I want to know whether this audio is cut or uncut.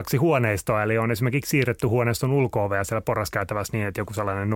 uncut